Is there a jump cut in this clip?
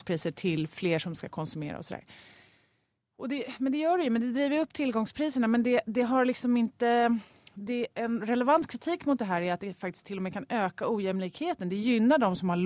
no; 0 cuts

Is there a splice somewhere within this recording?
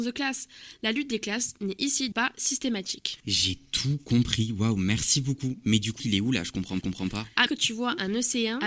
yes; 5 cuts; at 2.1 s, 3.2 s, 6.0 s, 6.8 s, 7.5 s

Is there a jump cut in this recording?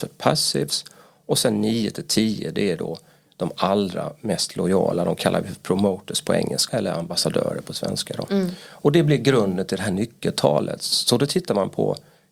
yes; 1 cut; at 6.7 s

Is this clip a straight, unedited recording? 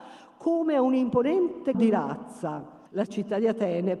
no; 2 cuts; at 1.7 s, 2.9 s

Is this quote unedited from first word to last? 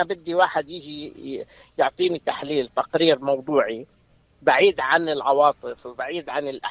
yes; 0 cuts

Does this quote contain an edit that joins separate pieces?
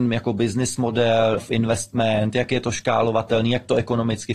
yes; 1 cut; at 1.4 s

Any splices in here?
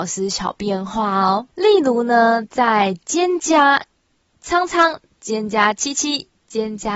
yes; 1 cut; at 1.5 s

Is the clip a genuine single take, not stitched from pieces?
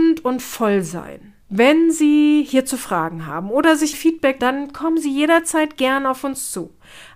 no; 3 cuts; at 1.4 s, 3.9 s, 4.4 s

